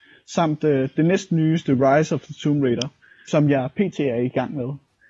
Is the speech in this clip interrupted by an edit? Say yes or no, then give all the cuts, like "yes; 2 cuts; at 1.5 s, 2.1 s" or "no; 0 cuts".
no; 0 cuts